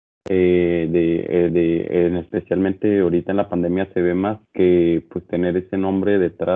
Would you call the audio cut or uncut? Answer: cut